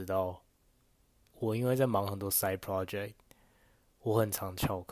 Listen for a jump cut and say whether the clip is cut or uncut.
uncut